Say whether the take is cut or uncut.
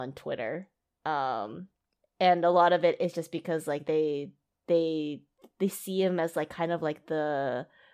uncut